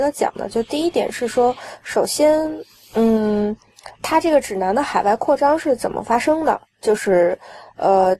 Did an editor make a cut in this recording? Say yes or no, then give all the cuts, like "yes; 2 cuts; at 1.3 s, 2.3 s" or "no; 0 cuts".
yes; 1 cut; at 3.9 s